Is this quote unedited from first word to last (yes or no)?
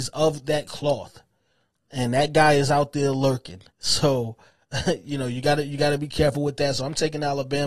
no